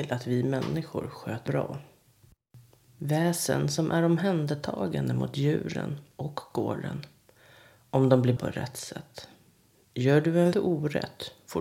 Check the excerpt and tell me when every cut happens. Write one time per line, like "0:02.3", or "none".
0:01.5
0:08.4
0:10.5